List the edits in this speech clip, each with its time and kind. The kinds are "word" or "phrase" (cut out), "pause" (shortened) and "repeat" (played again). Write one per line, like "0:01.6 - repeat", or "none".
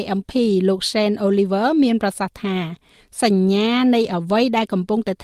none